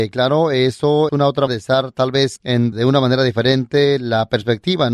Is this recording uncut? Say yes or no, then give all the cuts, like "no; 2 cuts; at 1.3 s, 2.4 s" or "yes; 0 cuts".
no; 4 cuts; at 1.1 s, 1.5 s, 2.4 s, 2.7 s